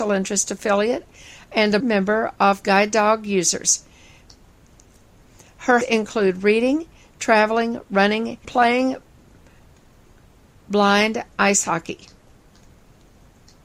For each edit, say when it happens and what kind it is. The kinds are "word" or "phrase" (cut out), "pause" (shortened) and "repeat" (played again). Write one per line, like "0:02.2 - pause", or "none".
0:01.8 - word
0:05.8 - word
0:08.4 - word